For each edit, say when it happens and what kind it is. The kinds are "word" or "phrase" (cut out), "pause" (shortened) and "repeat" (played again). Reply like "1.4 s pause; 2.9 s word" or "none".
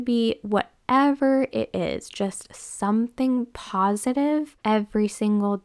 4.6 s pause